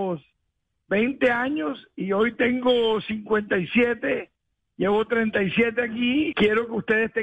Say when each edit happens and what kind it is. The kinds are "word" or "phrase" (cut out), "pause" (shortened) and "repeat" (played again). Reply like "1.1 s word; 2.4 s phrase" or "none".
6.3 s word